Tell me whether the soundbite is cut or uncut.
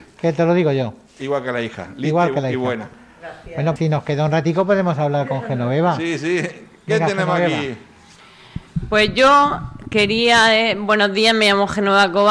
cut